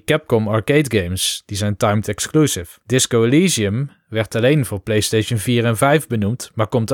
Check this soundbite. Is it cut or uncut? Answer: cut